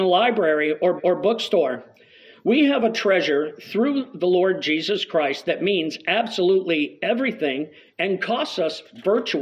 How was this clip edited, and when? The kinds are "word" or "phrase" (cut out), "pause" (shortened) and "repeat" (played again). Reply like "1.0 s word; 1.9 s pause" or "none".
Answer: 1.0 s repeat